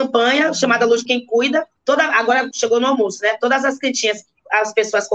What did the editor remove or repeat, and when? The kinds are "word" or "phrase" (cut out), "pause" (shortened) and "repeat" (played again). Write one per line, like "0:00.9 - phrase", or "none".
0:01.0 - word
0:01.8 - word
0:02.5 - word